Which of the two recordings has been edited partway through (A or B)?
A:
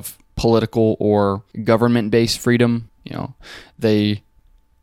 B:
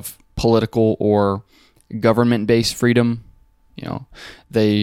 A